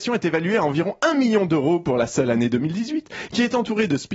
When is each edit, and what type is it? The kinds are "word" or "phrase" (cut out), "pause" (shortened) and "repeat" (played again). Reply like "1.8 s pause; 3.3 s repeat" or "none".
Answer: none